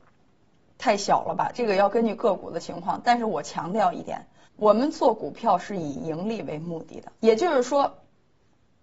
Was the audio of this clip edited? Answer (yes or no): yes